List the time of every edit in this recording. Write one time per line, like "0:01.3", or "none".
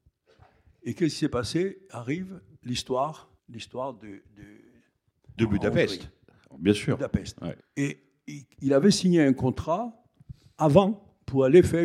0:03.4
0:05.4
0:07.6